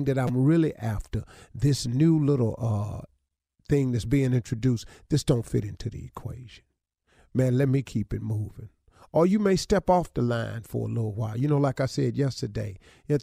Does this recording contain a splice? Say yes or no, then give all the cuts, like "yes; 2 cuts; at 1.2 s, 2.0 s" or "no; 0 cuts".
no; 0 cuts